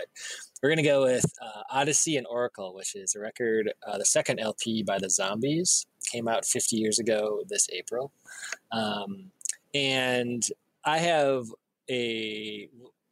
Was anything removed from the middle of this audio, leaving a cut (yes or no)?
no